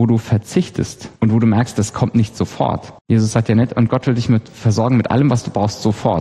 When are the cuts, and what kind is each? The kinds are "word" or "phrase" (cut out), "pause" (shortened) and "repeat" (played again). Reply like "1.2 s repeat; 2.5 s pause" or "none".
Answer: 1.2 s pause; 3.0 s pause